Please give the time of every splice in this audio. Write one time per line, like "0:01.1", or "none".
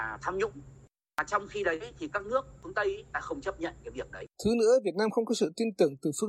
0:03.1
0:04.3